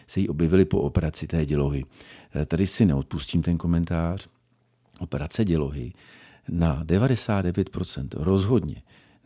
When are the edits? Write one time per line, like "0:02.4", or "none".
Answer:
none